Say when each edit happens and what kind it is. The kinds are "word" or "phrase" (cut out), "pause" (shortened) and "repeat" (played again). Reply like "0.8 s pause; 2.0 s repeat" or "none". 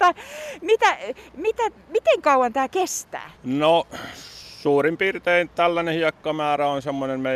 3.3 s pause